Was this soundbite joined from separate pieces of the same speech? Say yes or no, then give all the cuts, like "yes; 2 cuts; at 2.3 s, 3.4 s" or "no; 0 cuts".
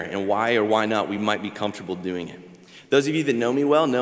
no; 0 cuts